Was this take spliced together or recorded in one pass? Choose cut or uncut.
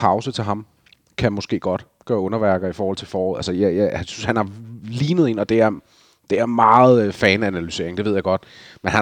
uncut